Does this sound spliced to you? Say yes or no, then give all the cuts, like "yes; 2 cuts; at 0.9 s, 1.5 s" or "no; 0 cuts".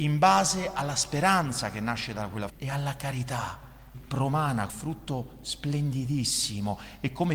yes; 3 cuts; at 2.5 s, 3.9 s, 4.7 s